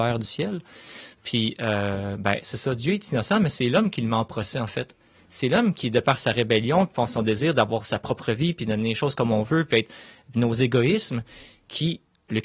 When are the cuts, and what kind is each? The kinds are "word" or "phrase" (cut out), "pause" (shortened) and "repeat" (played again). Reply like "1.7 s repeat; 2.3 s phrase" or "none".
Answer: none

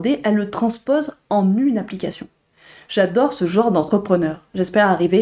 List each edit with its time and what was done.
none

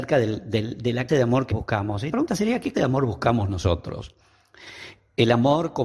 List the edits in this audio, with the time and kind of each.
1.1 s word; 1.5 s word; 2.1 s word; 2.7 s word

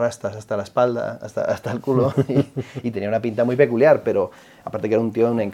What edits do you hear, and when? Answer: none

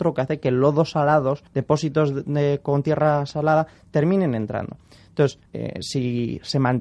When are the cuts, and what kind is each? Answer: 1.5 s pause; 5.5 s pause

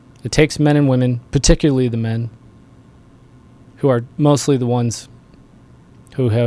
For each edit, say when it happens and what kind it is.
1.3 s pause; 4.1 s pause

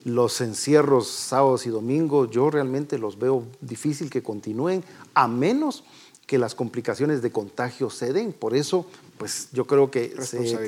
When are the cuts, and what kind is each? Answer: none

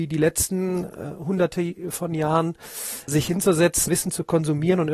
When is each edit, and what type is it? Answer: 3.1 s word; 3.9 s word

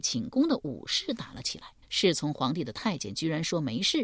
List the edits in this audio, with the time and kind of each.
1.8 s pause

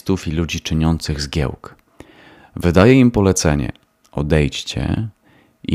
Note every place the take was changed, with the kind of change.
none

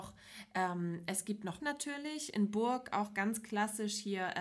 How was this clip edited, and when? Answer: 1.6 s word

